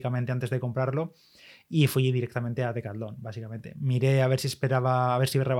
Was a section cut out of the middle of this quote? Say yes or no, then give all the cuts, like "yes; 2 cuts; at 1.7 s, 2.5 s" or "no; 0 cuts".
no; 0 cuts